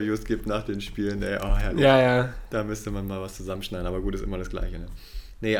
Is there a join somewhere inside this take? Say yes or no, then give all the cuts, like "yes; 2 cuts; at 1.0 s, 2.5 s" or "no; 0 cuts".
no; 0 cuts